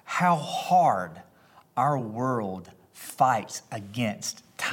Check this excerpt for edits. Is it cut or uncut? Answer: uncut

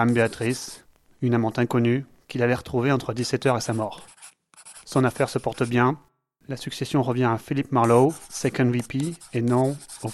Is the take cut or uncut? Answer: uncut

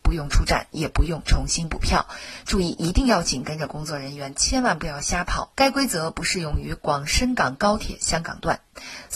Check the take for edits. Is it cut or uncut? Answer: cut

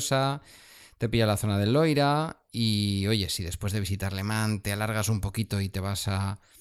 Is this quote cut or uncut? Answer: uncut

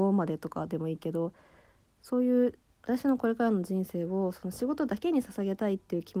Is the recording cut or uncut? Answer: uncut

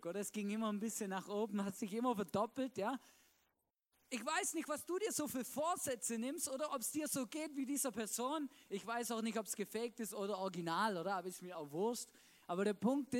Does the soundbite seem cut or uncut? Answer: uncut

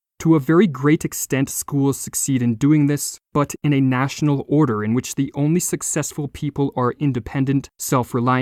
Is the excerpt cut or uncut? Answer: cut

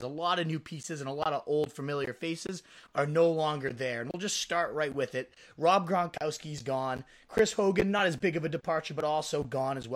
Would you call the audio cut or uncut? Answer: uncut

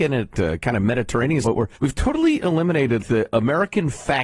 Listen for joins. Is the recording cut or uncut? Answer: cut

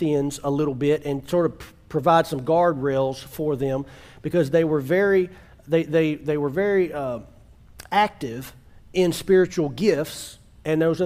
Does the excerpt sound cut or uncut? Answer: uncut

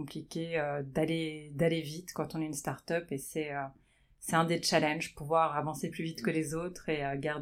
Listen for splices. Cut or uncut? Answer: uncut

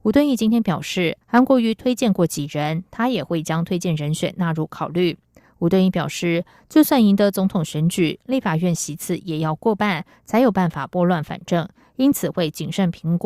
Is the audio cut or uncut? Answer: cut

